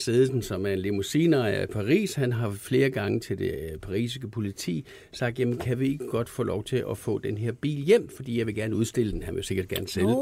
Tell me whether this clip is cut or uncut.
uncut